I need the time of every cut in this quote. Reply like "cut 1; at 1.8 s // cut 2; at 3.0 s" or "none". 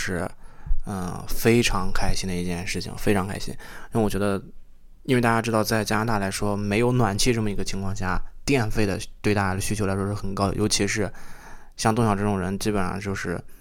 none